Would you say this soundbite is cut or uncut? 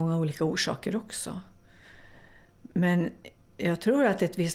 cut